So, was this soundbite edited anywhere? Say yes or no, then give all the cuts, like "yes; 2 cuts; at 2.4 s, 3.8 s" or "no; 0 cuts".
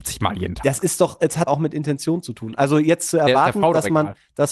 yes; 1 cut; at 1.5 s